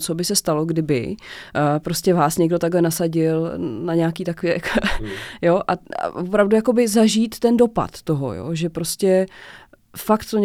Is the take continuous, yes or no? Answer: yes